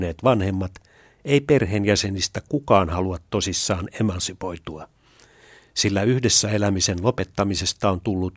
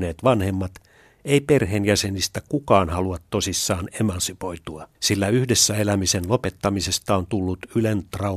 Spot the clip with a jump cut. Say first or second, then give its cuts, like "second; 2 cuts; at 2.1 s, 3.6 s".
second; 1 cut; at 4.9 s